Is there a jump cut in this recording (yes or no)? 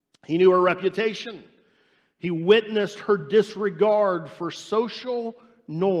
no